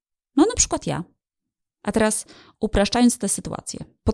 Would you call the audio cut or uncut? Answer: uncut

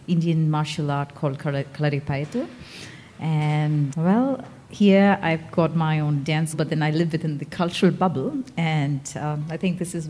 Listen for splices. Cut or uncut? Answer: cut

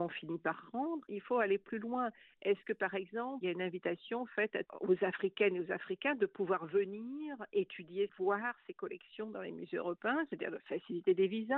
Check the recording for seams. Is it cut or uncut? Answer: uncut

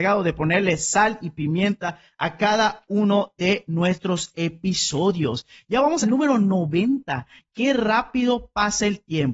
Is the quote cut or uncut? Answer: cut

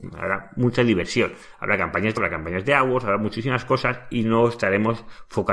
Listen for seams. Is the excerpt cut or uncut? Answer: cut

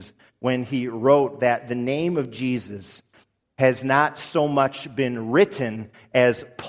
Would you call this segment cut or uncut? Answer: uncut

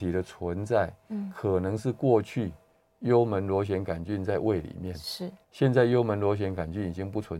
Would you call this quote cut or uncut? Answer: cut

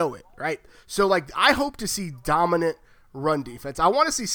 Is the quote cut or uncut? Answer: uncut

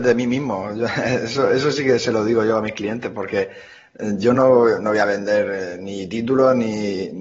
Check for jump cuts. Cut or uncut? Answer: uncut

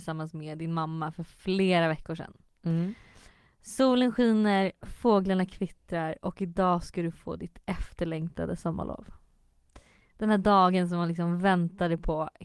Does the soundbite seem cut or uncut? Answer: uncut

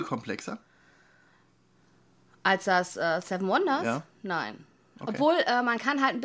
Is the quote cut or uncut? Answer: uncut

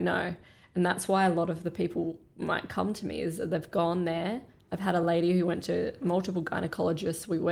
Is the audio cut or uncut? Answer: uncut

